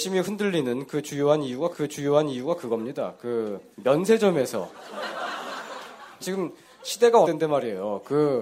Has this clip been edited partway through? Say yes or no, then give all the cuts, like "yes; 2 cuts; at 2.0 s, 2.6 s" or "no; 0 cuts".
yes; 4 cuts; at 1.7 s, 3.7 s, 6.2 s, 7.2 s